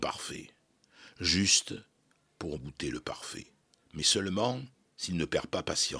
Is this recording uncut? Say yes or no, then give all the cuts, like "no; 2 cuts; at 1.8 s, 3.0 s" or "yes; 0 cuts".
no; 3 cuts; at 2.6 s, 3.6 s, 4.7 s